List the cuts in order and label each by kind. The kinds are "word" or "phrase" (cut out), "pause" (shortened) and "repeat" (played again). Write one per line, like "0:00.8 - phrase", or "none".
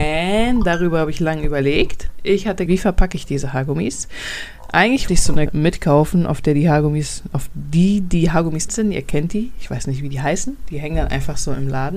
0:02.7 - word
0:05.1 - word
0:05.5 - word
0:07.3 - word
0:08.7 - word